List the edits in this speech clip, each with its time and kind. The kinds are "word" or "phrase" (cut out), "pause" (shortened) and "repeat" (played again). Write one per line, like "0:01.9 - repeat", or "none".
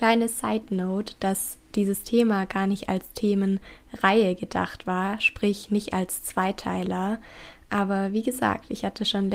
none